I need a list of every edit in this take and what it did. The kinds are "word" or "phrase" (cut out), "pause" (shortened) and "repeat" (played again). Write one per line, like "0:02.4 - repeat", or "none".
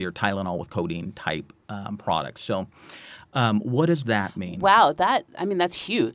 none